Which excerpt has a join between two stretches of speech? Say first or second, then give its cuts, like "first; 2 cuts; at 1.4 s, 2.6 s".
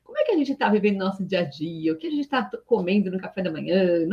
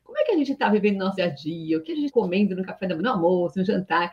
second; 3 cuts; at 1.2 s, 2.1 s, 3.0 s